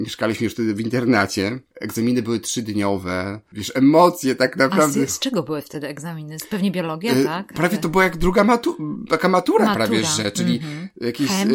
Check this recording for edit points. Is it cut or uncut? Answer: uncut